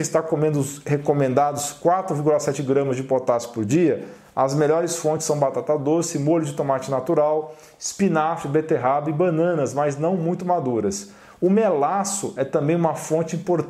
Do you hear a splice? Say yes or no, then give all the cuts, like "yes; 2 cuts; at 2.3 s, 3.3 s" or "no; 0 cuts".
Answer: no; 0 cuts